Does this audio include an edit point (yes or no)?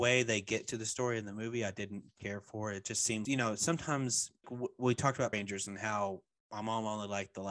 yes